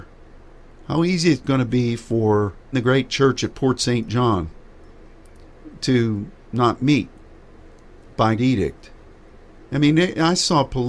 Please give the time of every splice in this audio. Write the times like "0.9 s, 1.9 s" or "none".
2.7 s, 8.4 s

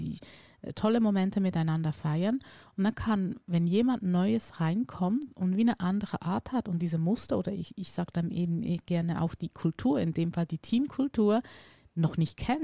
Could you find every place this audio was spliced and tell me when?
none

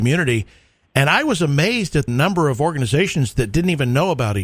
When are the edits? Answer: 2.1 s

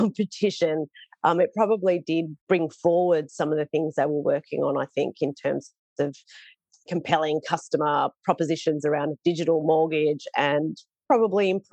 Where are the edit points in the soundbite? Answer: 6.9 s

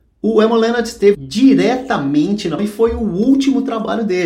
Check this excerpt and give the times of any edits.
1.1 s, 2.6 s

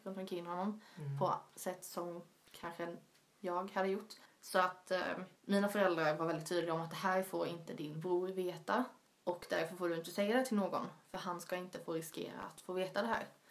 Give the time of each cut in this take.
none

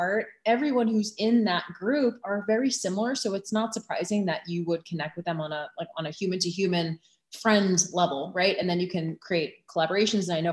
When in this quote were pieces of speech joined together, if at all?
none

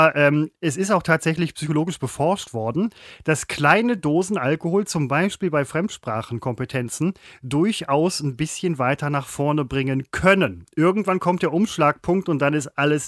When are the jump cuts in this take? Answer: none

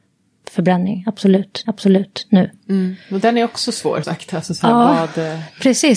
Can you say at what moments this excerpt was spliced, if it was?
1.6 s, 4.0 s

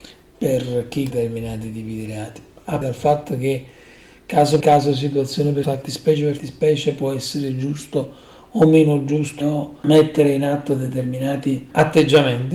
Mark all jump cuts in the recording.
1.1 s, 2.8 s, 4.6 s, 5.6 s, 6.4 s, 9.4 s

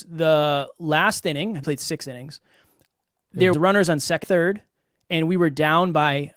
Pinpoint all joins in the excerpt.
1.6 s, 3.5 s, 4.2 s

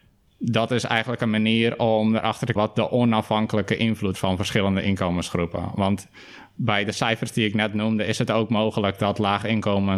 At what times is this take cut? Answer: 2.6 s, 4.2 s

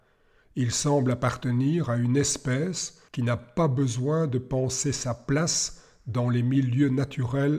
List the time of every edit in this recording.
3.1 s

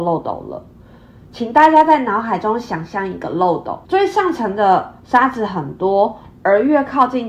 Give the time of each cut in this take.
3.8 s

